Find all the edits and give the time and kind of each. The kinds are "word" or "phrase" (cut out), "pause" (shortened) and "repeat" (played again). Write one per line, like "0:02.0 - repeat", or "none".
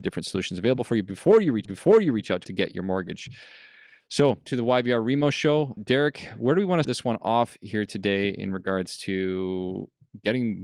0:01.6 - repeat
0:02.4 - phrase
0:04.5 - phrase
0:05.8 - word
0:06.8 - word